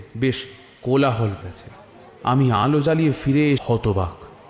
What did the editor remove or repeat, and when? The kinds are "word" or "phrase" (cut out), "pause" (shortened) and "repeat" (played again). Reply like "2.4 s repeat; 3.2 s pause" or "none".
1.4 s word; 3.6 s word